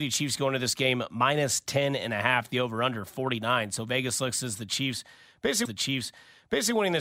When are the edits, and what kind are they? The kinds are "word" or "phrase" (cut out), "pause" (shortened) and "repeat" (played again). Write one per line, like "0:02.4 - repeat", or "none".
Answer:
0:05.7 - repeat